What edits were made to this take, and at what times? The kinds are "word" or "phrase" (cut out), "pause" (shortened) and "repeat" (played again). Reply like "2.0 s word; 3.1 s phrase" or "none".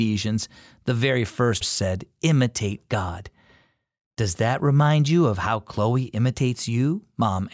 1.6 s word